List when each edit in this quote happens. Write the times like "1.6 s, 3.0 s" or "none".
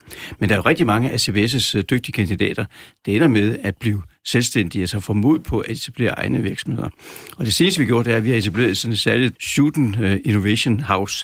9.4 s